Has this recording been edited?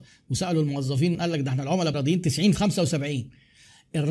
yes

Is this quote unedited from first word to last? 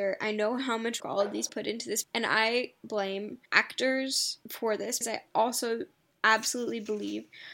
no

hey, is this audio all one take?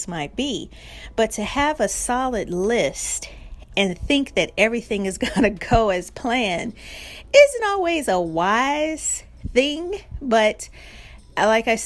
yes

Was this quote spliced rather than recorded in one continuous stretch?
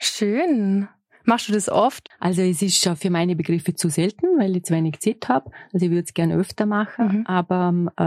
no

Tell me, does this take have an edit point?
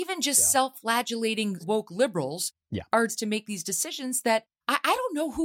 yes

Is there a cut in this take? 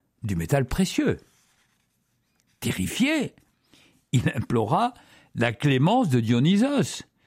no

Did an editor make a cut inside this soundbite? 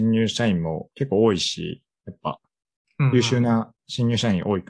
yes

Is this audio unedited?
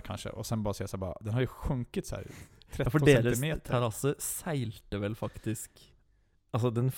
yes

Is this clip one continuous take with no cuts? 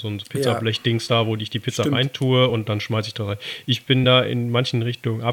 yes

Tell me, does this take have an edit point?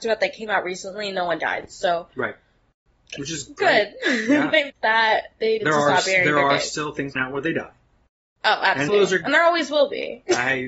yes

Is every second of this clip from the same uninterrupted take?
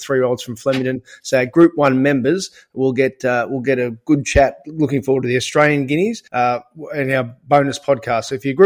no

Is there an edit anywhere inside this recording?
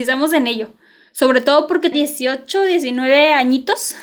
yes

